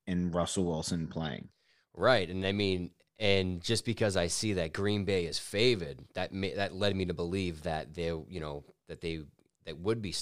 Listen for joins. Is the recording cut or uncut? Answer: uncut